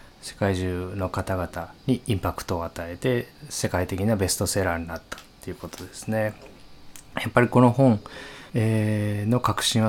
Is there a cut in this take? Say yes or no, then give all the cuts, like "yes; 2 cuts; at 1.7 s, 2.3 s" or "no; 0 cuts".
yes; 1 cut; at 8.5 s